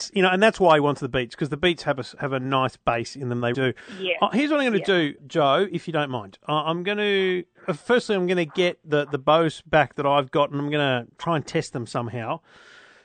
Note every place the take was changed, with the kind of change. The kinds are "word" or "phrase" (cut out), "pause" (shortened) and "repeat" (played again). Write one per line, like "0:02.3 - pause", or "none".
0:03.5 - word
0:05.2 - word